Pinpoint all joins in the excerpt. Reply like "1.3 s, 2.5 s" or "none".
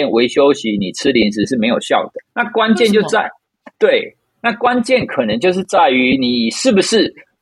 2.2 s